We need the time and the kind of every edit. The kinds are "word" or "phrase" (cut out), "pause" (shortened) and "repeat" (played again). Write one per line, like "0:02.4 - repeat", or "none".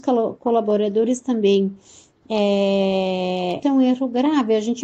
0:03.6 - word